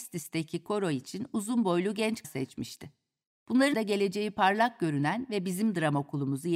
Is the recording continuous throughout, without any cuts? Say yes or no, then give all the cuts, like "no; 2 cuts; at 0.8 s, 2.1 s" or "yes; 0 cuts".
no; 2 cuts; at 2.2 s, 3.7 s